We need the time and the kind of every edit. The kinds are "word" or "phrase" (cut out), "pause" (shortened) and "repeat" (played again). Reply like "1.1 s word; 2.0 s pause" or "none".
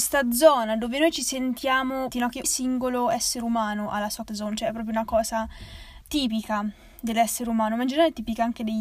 2.1 s word; 2.4 s word; 4.3 s word; 6.0 s word